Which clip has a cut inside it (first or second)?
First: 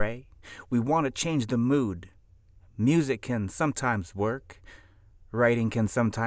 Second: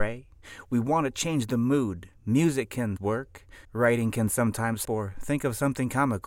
second